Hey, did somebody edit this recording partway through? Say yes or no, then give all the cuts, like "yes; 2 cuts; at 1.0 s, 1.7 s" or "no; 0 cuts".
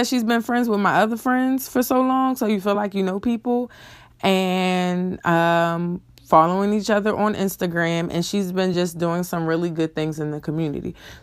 no; 0 cuts